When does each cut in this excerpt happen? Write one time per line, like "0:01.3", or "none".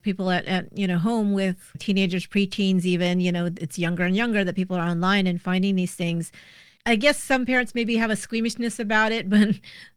none